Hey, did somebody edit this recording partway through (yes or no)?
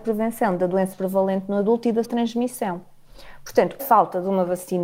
yes